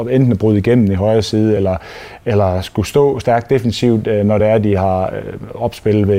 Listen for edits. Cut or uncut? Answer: uncut